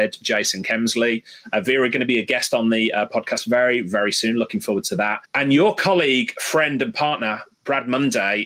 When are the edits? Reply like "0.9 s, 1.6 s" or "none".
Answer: 5.3 s